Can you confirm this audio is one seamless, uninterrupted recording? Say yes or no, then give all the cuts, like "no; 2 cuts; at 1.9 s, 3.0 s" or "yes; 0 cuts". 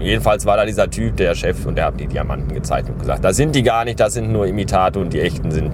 no; 1 cut; at 2.0 s